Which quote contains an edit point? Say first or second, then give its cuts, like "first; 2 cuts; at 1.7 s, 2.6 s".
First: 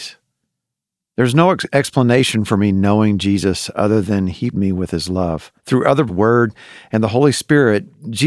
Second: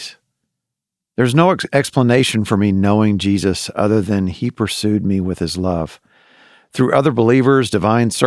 first; 3 cuts; at 4.5 s, 5.6 s, 6.1 s